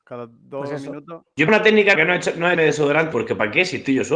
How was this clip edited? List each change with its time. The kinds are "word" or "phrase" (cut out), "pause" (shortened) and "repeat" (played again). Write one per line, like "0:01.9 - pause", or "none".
0:01.5 - word
0:01.9 - word
0:02.5 - word
0:03.1 - word